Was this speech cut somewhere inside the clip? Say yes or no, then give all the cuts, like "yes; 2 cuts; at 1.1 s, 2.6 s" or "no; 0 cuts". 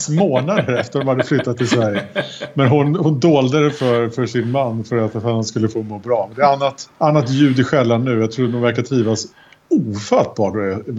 yes; 1 cut; at 6.9 s